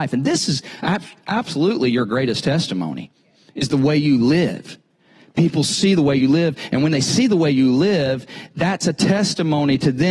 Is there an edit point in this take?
no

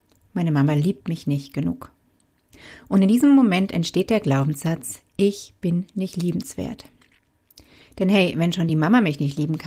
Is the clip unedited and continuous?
yes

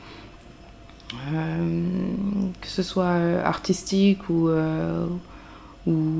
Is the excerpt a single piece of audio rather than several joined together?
yes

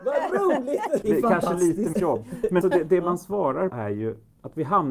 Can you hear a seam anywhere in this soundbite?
yes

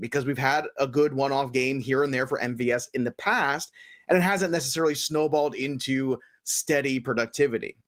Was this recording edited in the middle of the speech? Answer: no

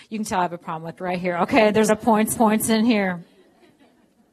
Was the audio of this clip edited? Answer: yes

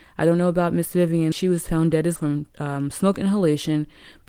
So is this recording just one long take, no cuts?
no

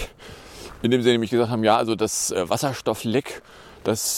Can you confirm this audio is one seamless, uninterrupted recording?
yes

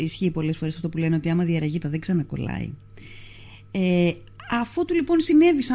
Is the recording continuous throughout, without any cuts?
no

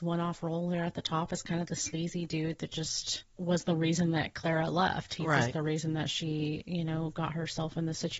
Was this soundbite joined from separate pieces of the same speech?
no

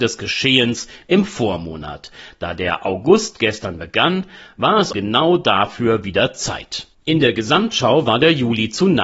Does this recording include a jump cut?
yes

